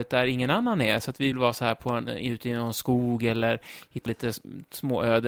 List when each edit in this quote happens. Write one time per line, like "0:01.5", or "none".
0:01.3
0:04.1

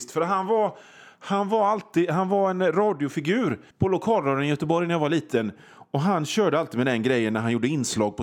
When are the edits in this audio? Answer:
0:03.7

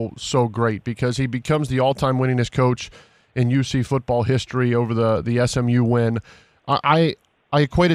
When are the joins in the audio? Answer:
none

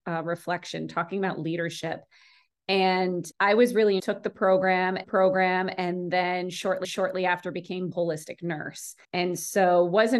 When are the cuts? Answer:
0:03.3
0:04.0
0:05.0
0:06.8
0:07.9
0:09.0

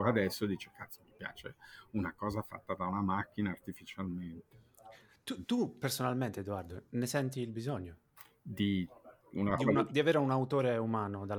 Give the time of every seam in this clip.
none

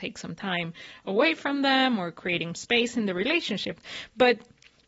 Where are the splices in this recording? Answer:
0:02.5

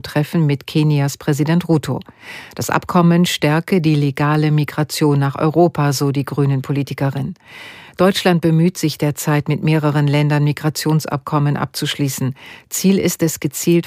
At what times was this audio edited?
none

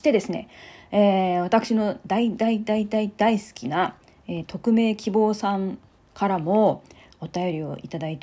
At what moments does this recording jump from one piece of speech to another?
none

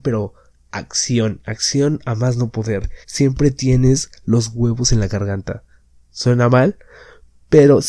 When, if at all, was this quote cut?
0:03.0

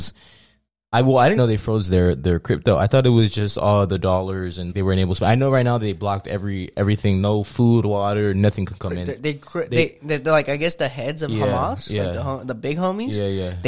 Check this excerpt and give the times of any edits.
0:01.4
0:04.7

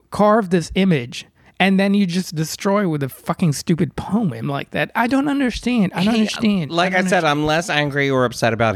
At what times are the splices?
none

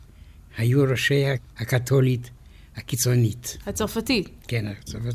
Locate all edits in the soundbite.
0:01.5

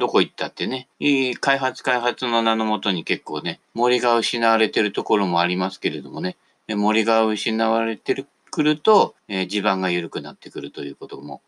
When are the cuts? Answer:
0:00.9
0:03.6
0:06.4
0:09.2

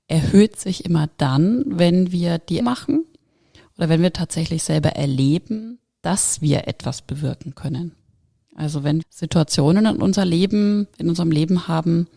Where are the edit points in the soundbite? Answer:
0:02.6
0:09.0

